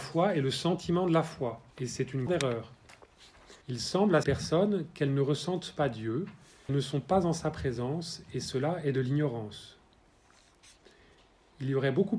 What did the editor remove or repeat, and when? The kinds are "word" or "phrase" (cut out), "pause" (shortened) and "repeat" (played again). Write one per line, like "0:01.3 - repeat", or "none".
0:01.7 - pause
0:02.3 - word
0:03.6 - pause
0:04.2 - word
0:06.7 - word